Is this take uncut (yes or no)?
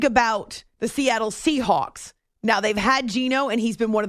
yes